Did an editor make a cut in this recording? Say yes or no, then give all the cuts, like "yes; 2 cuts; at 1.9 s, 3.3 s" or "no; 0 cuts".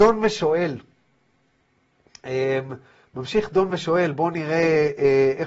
no; 0 cuts